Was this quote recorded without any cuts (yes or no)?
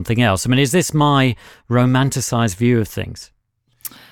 yes